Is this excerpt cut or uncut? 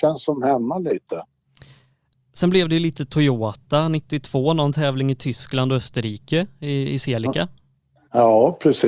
uncut